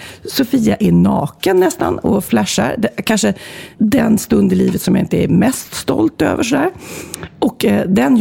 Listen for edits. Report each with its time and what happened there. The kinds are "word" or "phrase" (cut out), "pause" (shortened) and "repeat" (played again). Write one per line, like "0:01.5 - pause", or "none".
0:03.7 - pause